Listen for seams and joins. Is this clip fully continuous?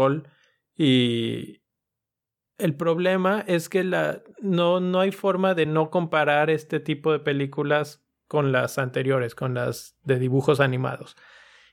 yes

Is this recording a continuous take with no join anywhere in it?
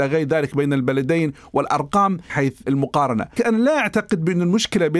no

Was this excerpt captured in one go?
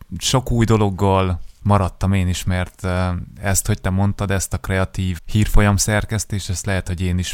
no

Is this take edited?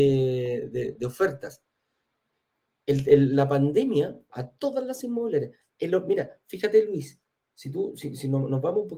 yes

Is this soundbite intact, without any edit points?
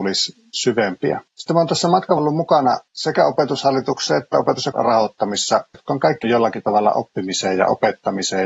no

